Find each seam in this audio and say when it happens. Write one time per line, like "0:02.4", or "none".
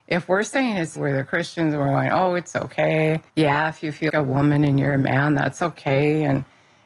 0:01.0
0:03.3
0:04.1